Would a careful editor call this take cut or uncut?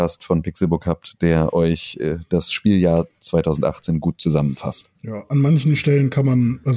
cut